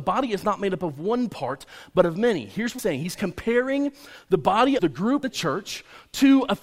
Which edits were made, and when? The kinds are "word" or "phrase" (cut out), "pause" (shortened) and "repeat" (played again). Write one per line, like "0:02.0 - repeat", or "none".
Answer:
0:02.8 - word
0:04.8 - phrase
0:05.2 - phrase